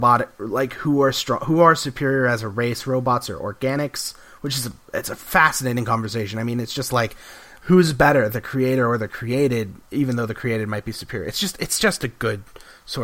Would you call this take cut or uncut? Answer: uncut